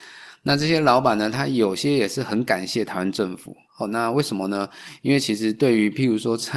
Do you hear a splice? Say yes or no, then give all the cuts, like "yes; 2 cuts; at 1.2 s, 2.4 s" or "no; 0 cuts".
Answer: yes; 1 cut; at 3.6 s